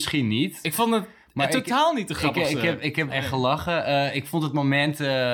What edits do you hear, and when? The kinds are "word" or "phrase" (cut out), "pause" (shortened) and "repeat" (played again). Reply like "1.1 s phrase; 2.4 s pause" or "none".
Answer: 3.1 s word